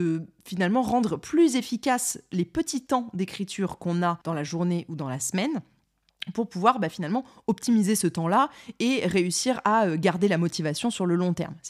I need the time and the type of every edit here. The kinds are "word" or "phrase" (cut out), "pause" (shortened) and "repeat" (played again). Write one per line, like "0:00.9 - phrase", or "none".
0:04.2 - pause